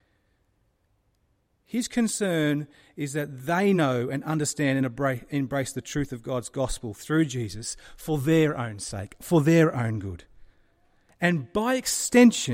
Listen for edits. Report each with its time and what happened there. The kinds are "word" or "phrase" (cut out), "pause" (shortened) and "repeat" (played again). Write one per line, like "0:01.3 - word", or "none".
none